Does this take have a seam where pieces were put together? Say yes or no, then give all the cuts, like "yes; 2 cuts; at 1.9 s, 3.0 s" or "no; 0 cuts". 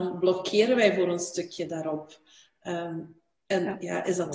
no; 0 cuts